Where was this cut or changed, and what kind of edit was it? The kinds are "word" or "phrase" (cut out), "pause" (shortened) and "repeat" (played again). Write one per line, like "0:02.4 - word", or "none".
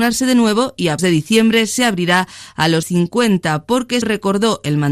0:01.0 - word
0:02.8 - phrase
0:04.0 - word